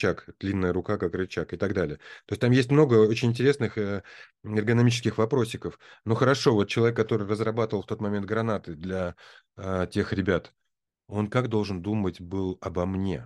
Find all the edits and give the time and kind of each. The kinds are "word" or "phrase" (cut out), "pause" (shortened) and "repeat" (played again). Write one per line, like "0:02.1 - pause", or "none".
none